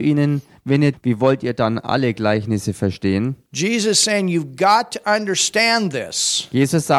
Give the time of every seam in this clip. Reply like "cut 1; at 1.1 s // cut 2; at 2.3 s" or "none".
cut 1; at 0.9 s